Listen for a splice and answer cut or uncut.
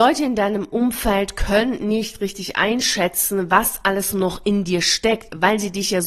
uncut